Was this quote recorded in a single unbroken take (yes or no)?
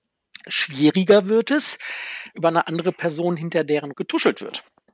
no